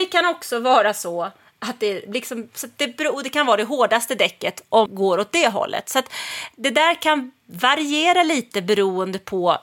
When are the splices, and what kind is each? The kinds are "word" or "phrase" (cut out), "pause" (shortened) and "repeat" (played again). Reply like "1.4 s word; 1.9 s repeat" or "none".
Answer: 4.9 s word